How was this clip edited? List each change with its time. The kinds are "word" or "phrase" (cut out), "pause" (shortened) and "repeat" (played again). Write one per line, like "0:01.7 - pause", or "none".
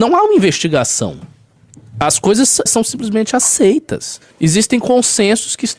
0:02.7 - word
0:04.3 - pause